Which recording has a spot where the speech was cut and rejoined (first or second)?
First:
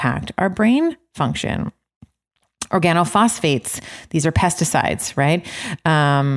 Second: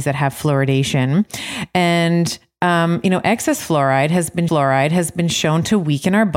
second